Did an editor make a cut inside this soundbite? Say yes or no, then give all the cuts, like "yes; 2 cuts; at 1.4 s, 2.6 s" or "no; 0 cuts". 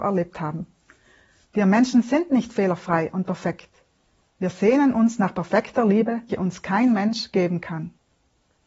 yes; 1 cut; at 6.3 s